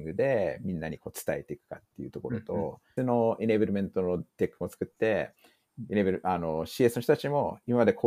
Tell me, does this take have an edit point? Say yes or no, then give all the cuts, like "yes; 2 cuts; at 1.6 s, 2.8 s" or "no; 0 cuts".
yes; 2 cuts; at 3.0 s, 4.3 s